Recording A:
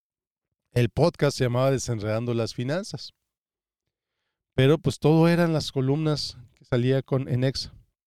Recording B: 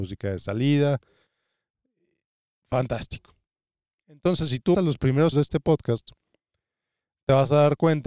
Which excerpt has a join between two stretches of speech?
B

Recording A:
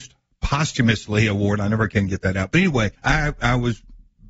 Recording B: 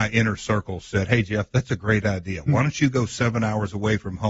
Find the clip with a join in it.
A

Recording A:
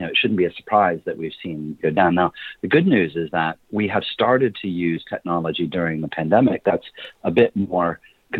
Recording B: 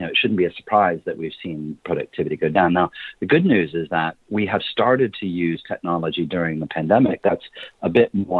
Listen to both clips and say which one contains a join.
A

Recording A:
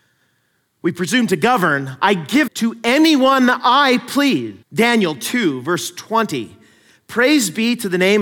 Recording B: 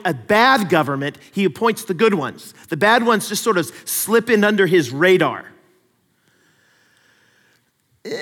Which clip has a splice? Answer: A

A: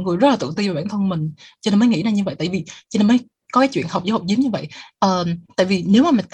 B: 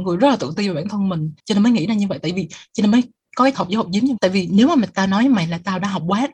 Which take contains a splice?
B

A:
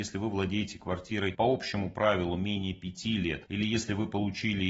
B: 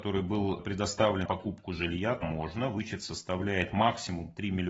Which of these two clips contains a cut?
B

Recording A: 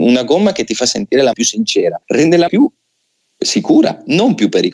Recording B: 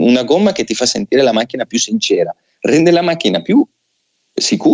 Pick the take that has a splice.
A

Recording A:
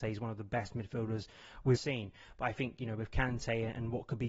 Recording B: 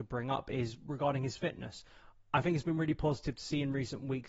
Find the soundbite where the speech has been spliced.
A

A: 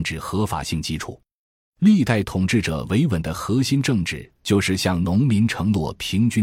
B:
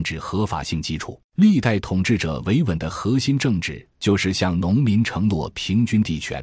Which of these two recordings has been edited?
B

